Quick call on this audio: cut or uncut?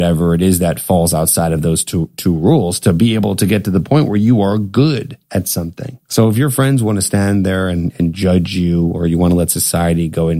cut